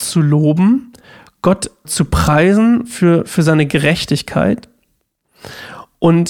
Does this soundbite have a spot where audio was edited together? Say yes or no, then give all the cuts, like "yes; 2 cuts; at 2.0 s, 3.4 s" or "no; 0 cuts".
yes; 1 cut; at 1.8 s